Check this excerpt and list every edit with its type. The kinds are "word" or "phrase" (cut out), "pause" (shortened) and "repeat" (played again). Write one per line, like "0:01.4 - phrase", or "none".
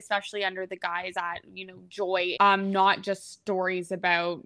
0:01.1 - word
0:02.3 - phrase